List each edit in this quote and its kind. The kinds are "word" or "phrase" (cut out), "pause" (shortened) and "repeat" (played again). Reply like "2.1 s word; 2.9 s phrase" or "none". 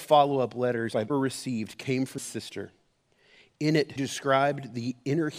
1.1 s word; 2.2 s word; 4.0 s word